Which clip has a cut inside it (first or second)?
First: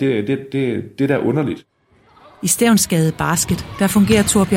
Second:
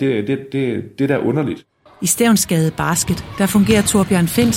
second